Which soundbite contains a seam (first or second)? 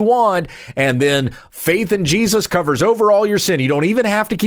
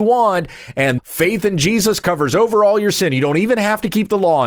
second